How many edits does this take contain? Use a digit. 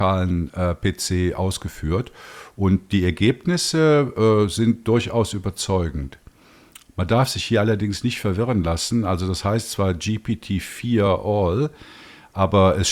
0